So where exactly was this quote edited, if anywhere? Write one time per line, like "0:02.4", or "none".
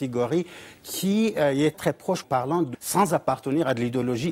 0:01.7
0:02.2
0:02.7